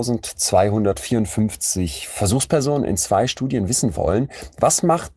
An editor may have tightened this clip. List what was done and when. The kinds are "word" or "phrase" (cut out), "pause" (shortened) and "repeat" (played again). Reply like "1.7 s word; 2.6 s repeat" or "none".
none